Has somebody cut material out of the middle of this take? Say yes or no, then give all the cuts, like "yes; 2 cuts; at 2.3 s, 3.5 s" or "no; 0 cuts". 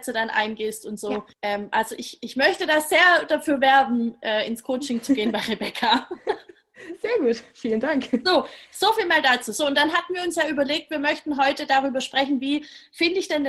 yes; 1 cut; at 1.3 s